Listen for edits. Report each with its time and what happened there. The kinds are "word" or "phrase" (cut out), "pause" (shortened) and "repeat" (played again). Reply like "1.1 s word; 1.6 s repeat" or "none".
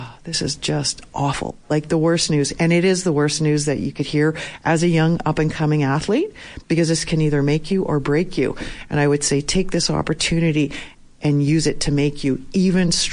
none

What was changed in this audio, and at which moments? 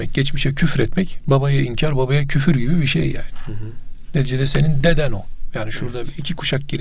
none

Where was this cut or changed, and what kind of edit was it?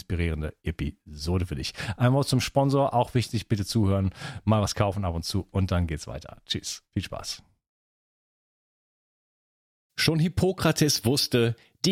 none

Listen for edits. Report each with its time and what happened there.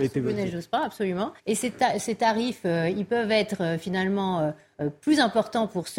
1.4 s pause

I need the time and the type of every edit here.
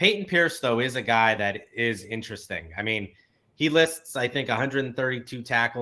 none

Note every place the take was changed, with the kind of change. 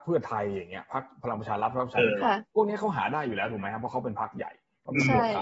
2.5 s pause

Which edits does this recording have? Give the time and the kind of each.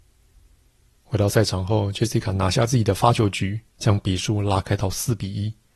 3.7 s pause

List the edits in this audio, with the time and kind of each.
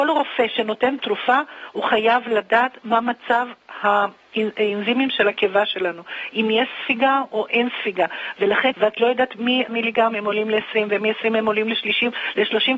8.7 s phrase; 9.7 s word

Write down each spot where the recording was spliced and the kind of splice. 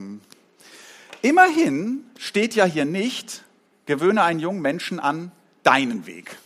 none

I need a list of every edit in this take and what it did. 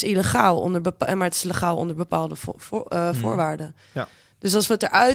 none

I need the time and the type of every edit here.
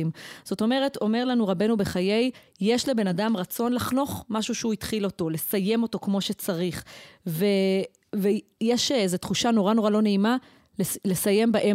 none

